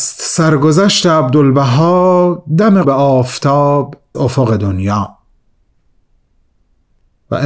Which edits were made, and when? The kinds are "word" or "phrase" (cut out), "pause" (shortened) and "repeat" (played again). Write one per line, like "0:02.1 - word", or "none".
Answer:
0:02.8 - word
0:04.1 - word